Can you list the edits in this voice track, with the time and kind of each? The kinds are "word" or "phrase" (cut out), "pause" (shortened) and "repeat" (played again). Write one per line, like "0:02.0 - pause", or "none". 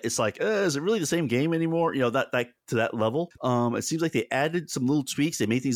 none